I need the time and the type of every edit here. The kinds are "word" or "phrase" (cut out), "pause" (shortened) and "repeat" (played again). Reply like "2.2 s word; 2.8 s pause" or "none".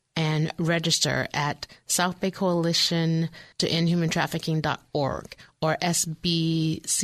3.5 s pause